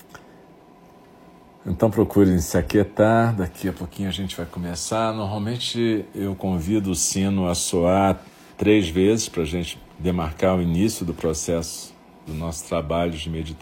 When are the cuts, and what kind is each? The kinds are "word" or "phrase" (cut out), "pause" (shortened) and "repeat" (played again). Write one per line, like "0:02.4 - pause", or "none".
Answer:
none